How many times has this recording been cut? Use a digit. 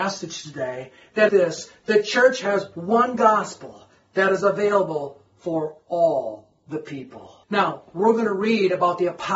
2